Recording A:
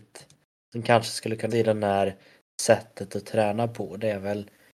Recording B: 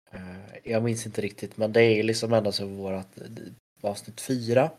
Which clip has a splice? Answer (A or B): A